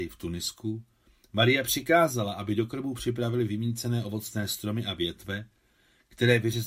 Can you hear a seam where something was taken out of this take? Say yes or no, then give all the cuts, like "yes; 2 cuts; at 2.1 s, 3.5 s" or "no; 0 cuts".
no; 0 cuts